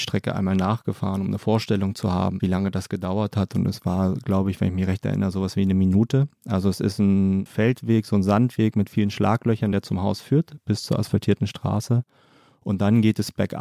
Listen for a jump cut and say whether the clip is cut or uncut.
uncut